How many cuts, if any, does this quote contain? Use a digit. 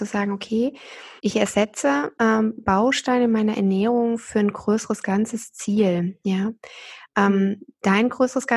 1